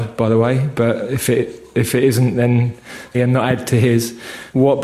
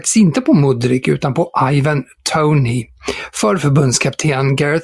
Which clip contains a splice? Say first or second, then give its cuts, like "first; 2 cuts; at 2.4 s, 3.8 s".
first; 1 cut; at 3.1 s